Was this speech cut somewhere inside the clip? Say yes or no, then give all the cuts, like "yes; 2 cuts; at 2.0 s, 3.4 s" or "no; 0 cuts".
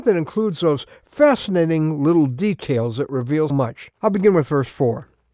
yes; 2 cuts; at 3.5 s, 3.9 s